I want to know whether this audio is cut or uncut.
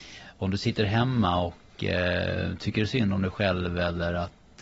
uncut